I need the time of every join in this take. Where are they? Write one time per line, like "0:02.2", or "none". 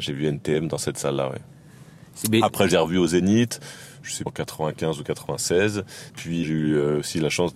0:02.7
0:04.3
0:06.1
0:06.4